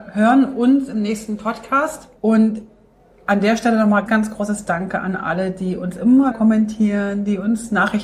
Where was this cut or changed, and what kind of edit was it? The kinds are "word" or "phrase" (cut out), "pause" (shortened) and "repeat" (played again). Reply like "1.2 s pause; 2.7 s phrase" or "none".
2.2 s pause; 4.1 s word; 6.3 s word